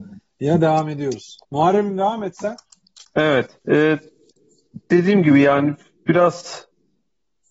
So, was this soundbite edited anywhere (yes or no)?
yes